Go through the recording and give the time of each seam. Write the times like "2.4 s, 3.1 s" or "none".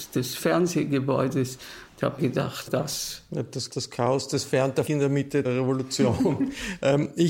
2.2 s, 2.7 s, 3.7 s, 4.9 s, 5.4 s